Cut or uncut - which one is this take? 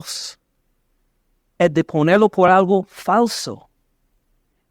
uncut